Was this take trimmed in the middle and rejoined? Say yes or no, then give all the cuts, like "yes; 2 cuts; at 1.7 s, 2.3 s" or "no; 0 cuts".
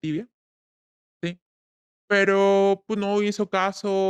no; 0 cuts